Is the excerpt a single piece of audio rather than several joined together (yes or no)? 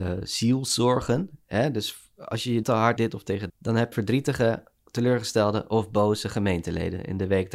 no